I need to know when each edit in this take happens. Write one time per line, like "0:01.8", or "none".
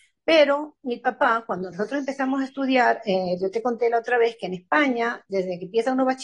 none